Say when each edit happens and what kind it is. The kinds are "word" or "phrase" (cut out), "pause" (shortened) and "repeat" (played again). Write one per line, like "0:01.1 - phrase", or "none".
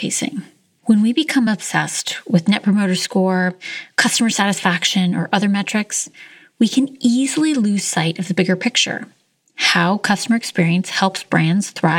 none